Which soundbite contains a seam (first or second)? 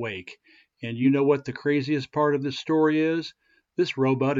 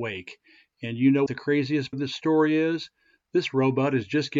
second